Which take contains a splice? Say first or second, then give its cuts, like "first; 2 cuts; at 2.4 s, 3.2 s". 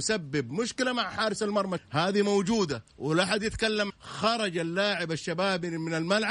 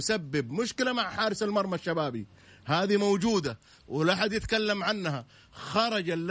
first; 3 cuts; at 1.8 s, 2.9 s, 3.9 s